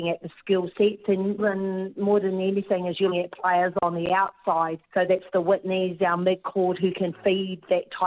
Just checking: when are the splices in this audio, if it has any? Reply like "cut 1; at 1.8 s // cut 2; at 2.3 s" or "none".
cut 1; at 1.4 s // cut 2; at 3.1 s // cut 3; at 4.8 s